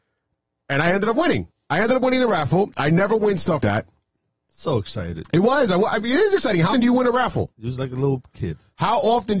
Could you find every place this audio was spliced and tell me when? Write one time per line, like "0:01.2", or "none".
0:01.5
0:03.6
0:06.7
0:07.5